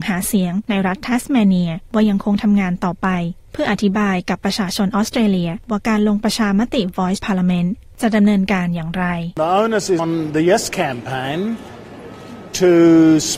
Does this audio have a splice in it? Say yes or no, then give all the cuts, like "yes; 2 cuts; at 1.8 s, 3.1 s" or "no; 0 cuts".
yes; 2 cuts; at 7.2 s, 10.0 s